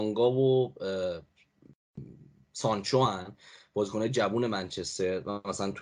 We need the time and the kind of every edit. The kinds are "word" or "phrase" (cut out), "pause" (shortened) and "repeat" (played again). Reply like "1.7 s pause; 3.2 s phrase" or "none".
none

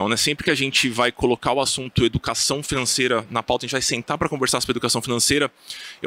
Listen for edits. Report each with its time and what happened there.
none

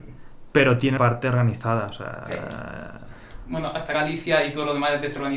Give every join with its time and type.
1.0 s word; 3.9 s word

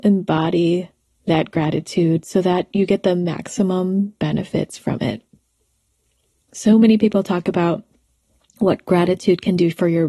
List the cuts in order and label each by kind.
none

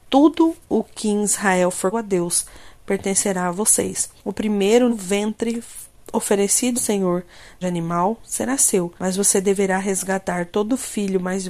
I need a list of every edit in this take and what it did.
1.9 s word; 4.2 s pause; 4.9 s phrase; 6.7 s word; 7.6 s phrase; 9.0 s pause

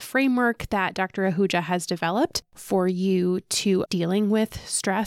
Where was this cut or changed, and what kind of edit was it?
3.9 s word

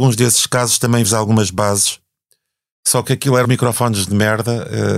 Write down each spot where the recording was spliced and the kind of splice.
1.0 s word; 3.4 s word

